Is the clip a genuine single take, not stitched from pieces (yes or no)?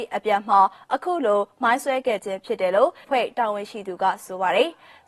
no